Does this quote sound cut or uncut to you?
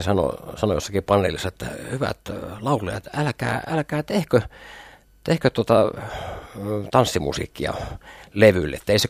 uncut